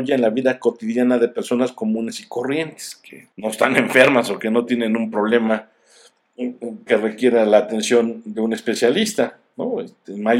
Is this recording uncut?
no; 1 cut; at 3.3 s

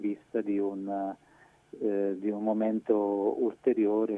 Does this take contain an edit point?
no; 0 cuts

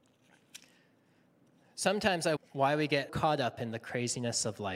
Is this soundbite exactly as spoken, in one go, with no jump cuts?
no; 2 cuts; at 2.4 s, 3.1 s

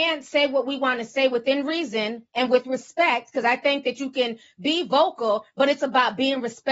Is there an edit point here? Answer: no; 0 cuts

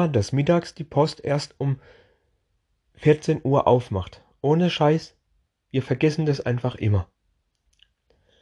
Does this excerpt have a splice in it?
no; 0 cuts

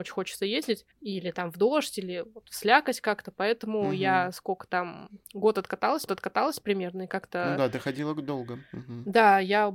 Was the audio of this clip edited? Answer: yes; 3 cuts; at 0.9 s, 5.2 s, 6.1 s

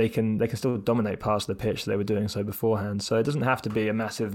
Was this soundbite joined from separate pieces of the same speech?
no; 0 cuts

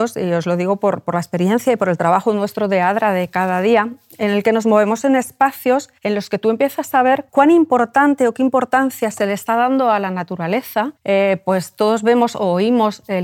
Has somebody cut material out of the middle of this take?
yes; 3 cuts; at 6.0 s, 7.3 s, 11.0 s

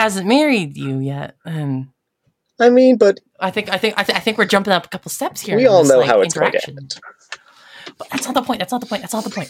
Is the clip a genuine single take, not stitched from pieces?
yes; 0 cuts

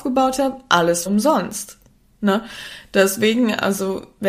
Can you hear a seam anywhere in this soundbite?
yes; 1 cut; at 1.1 s

